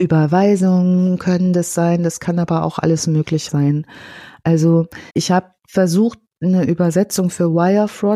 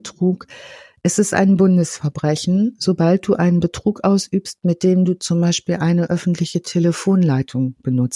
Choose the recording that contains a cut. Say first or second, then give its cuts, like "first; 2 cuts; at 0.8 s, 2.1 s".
first; 3 cuts; at 3.5 s, 5.1 s, 5.6 s